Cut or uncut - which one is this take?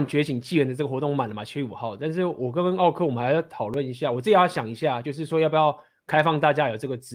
uncut